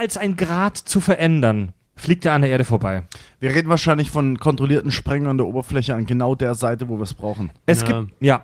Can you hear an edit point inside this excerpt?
yes; 1 cut; at 1.9 s

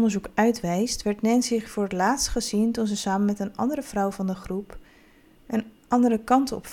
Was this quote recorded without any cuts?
yes; 0 cuts

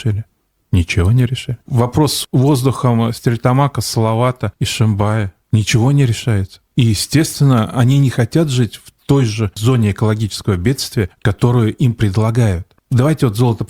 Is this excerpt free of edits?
no; 3 cuts; at 1.6 s, 5.4 s, 6.7 s

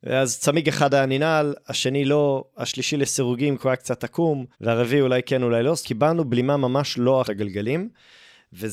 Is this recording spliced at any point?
yes; 3 cuts; at 4.5 s, 5.8 s, 7.2 s

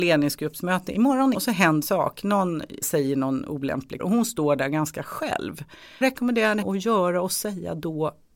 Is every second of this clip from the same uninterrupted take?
no; 6 cuts; at 1.3 s, 1.8 s, 2.8 s, 4.0 s, 6.0 s, 6.6 s

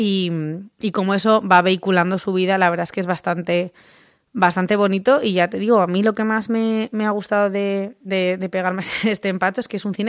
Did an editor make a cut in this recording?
no; 0 cuts

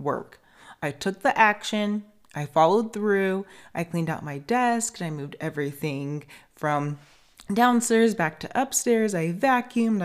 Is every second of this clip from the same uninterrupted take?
yes; 0 cuts

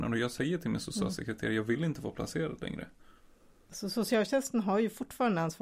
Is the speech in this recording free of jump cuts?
yes; 0 cuts

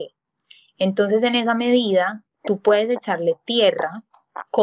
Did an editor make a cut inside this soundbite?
no; 0 cuts

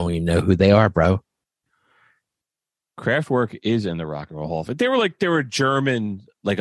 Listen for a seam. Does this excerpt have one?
no; 0 cuts

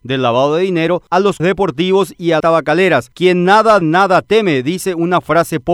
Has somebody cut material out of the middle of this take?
yes; 3 cuts; at 1.4 s, 2.4 s, 3.8 s

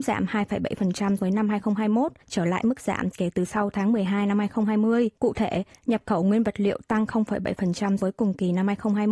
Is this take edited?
yes; 4 cuts; at 1.2 s, 2.2 s, 5.2 s, 8.0 s

